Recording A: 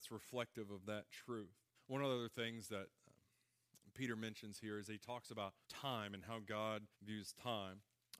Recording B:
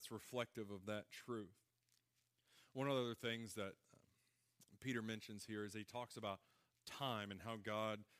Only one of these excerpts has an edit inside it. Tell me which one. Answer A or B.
A